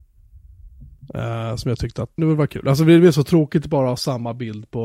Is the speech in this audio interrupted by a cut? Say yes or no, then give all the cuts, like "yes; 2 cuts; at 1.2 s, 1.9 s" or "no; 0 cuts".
yes; 1 cut; at 2.2 s